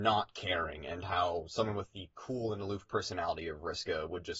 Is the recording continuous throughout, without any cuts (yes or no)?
yes